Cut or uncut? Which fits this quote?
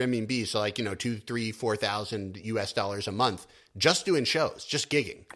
uncut